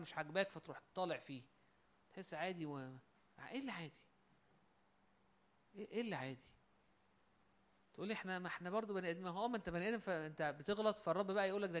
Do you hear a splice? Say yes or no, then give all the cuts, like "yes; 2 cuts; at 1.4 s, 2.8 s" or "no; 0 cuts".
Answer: no; 0 cuts